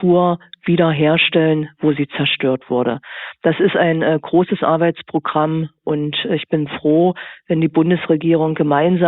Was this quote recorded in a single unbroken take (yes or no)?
yes